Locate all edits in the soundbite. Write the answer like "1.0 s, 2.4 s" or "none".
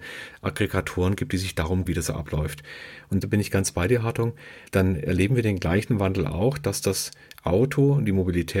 1.9 s, 3.2 s, 4.7 s